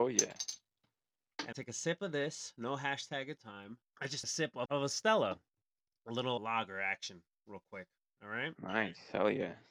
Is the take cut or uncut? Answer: cut